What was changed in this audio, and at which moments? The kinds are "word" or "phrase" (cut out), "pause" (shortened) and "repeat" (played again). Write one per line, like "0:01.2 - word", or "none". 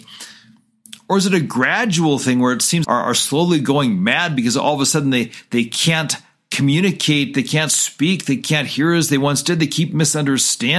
0:02.8 - phrase